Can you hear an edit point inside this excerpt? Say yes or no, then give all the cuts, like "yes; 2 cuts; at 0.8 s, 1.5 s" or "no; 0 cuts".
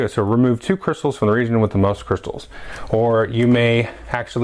no; 0 cuts